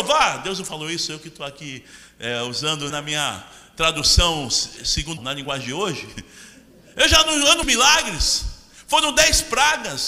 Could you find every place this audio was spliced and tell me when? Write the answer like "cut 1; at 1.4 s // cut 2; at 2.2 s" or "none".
cut 1; at 2.9 s // cut 2; at 4.8 s // cut 3; at 5.2 s // cut 4; at 7.6 s